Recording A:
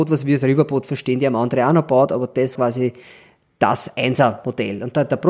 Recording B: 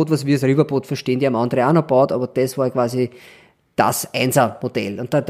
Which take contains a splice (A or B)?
A